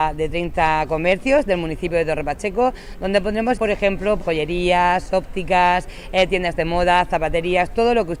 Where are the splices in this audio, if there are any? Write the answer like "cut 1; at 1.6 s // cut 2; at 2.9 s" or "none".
cut 1; at 3.6 s // cut 2; at 4.2 s